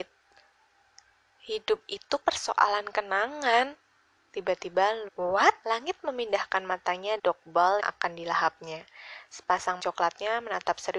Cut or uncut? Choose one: cut